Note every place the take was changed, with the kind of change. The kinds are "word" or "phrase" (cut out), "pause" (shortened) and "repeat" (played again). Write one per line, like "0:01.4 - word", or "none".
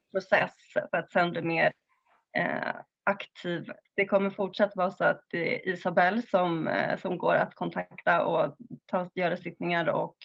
none